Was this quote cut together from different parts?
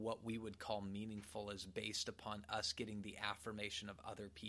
no; 0 cuts

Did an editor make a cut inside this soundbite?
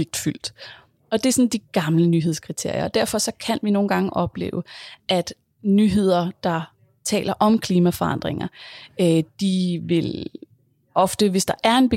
no; 0 cuts

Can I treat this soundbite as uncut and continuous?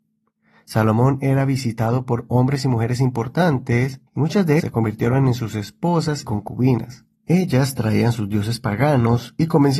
no; 4 cuts; at 4.1 s, 4.6 s, 6.2 s, 7.1 s

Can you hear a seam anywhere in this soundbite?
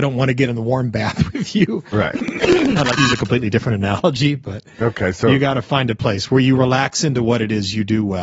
no; 0 cuts

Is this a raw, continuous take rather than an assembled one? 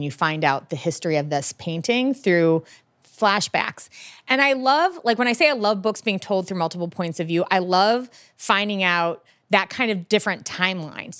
yes; 0 cuts

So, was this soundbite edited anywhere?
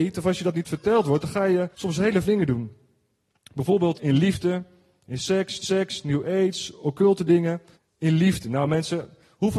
yes; 5 cuts; at 1.7 s, 2.2 s, 3.9 s, 5.6 s, 7.7 s

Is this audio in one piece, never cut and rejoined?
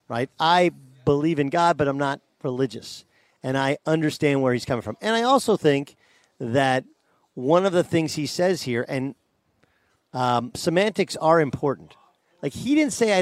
yes; 0 cuts

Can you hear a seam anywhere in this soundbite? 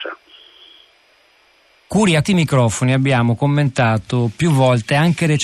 yes; 1 cut; at 2.2 s

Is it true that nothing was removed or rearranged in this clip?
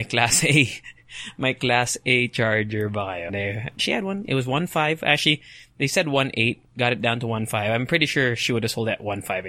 no; 2 cuts; at 3.3 s, 3.8 s

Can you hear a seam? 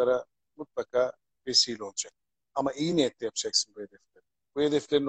no; 0 cuts

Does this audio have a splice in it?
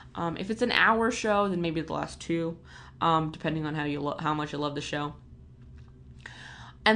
no; 0 cuts

